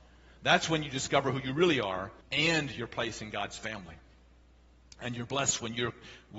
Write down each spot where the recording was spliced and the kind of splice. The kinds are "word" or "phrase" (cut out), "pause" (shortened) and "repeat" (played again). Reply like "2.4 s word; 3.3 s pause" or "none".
2.2 s pause